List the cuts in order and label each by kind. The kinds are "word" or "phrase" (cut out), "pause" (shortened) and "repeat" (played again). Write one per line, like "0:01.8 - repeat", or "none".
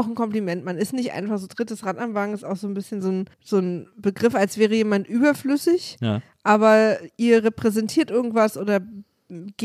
0:03.3 - pause